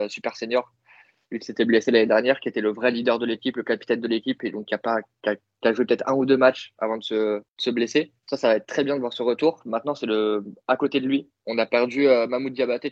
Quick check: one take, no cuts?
no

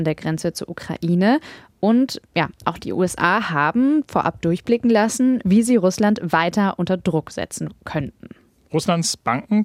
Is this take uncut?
yes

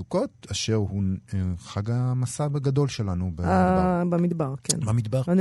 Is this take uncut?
yes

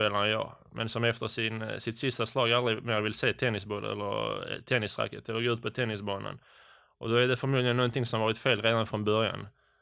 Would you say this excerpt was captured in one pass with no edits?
yes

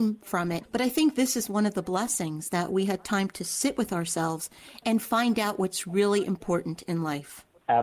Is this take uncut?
yes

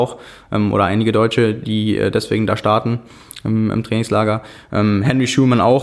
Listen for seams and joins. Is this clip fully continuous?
yes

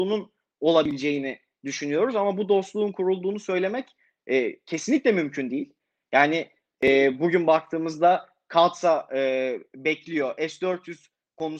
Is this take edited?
no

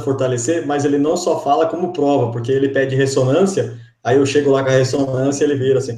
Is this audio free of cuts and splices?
yes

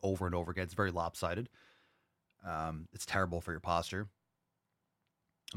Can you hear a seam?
no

